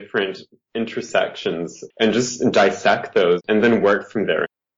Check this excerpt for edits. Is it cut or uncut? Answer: uncut